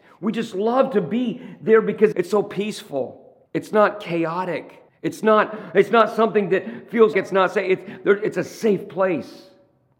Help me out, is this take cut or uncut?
cut